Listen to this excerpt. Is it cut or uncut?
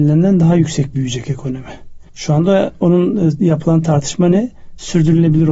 cut